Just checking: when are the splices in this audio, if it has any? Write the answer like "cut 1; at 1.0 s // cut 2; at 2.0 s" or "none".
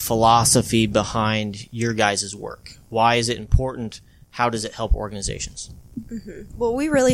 none